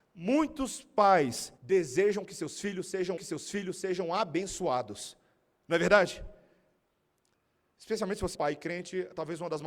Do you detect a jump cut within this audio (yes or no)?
yes